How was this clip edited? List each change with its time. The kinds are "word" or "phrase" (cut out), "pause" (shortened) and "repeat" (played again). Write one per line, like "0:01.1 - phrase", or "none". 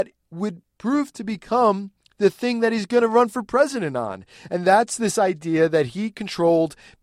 none